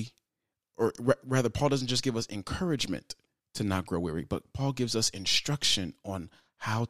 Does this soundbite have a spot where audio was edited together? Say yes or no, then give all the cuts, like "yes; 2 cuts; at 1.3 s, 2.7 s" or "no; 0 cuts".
yes; 1 cut; at 3.4 s